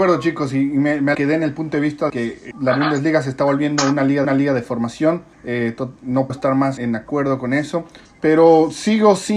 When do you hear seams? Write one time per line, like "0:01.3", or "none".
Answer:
0:01.1
0:02.1
0:02.5
0:04.2
0:05.3
0:06.0
0:06.3
0:06.8
0:08.0